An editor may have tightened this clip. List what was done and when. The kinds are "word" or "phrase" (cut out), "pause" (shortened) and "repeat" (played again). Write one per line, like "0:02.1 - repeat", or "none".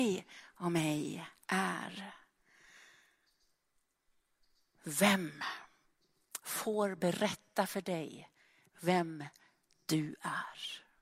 none